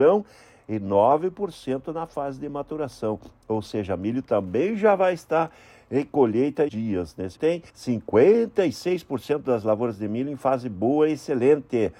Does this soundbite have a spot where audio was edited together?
yes; 3 cuts; at 6.7 s, 7.4 s, 7.7 s

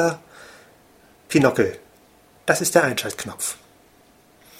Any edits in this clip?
no; 0 cuts

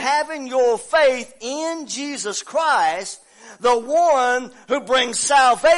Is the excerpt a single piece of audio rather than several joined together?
yes; 0 cuts

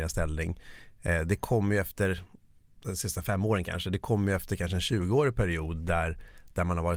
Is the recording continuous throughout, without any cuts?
yes; 0 cuts

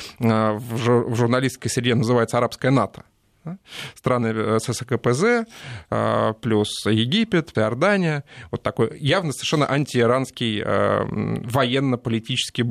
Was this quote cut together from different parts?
yes; 1 cut; at 7.5 s

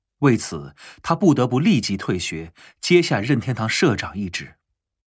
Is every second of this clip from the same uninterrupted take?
yes; 0 cuts

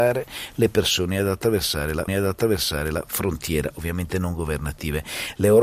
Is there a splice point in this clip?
yes; 1 cut; at 2.1 s

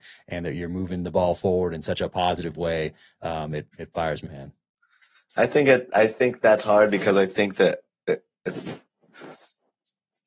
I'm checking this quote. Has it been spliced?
yes; 1 cut; at 4.3 s

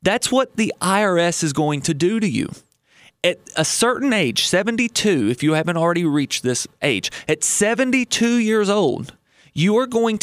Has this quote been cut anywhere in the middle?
no; 0 cuts

